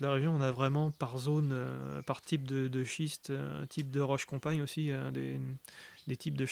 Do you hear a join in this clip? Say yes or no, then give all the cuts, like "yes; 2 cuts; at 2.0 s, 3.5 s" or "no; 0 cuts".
no; 0 cuts